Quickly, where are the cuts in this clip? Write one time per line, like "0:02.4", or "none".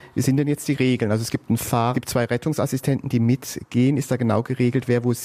0:01.9